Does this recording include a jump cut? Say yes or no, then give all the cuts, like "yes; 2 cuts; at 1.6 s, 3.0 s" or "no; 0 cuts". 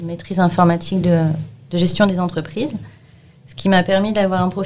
no; 0 cuts